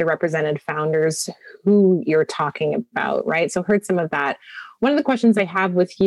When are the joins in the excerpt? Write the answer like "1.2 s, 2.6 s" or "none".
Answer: none